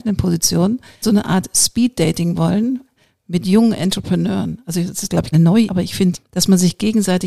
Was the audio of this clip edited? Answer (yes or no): yes